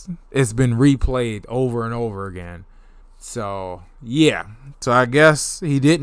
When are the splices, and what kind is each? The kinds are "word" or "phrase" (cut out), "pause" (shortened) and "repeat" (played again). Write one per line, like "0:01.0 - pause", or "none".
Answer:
0:03.0 - pause

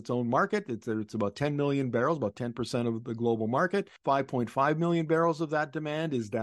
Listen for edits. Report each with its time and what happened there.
0:04.0 - pause

